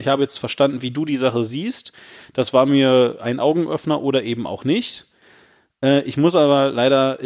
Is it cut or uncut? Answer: uncut